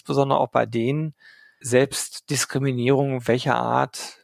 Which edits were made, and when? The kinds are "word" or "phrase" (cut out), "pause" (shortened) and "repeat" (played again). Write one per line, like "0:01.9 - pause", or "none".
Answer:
0:01.6 - word